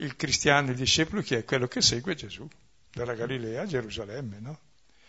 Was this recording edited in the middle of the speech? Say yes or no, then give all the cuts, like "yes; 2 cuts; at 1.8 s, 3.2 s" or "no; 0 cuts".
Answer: no; 0 cuts